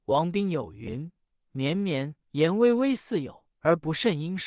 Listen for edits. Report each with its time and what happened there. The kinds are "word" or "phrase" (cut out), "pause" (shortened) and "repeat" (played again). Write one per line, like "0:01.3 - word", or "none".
0:01.2 - pause
0:02.2 - pause
0:03.5 - pause